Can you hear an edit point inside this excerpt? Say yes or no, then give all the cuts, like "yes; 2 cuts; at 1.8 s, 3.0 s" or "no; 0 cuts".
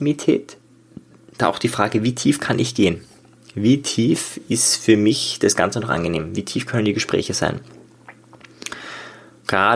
no; 0 cuts